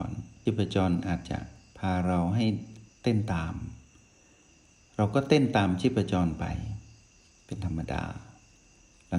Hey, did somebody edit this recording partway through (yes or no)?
no